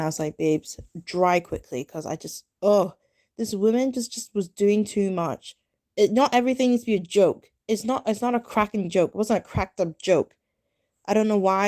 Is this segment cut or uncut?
uncut